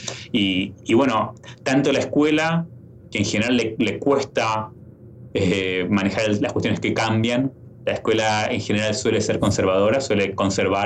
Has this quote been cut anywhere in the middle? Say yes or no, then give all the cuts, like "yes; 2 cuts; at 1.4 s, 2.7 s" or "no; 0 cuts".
no; 0 cuts